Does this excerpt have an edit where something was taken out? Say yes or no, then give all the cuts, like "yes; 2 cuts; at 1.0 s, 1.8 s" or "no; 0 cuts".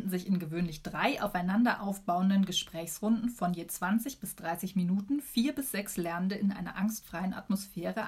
no; 0 cuts